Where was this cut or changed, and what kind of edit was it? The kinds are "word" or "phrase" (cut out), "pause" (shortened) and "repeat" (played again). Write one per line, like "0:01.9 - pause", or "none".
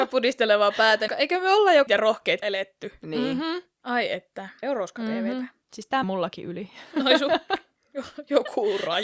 0:01.1 - phrase
0:01.9 - word
0:02.4 - word
0:04.6 - phrase
0:05.6 - pause
0:06.0 - word